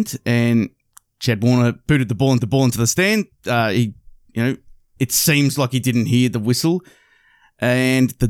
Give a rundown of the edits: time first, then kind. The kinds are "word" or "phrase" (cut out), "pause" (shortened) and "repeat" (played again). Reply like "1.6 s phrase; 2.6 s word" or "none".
2.4 s repeat